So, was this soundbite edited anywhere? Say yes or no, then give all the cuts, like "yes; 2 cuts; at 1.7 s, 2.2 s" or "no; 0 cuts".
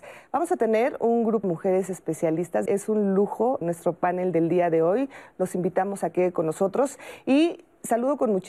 yes; 4 cuts; at 1.4 s, 2.7 s, 3.6 s, 6.1 s